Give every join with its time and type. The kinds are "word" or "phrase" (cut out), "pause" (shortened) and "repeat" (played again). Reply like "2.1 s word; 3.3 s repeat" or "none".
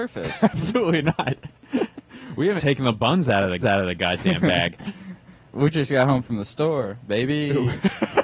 2.6 s word; 3.6 s repeat; 5.5 s word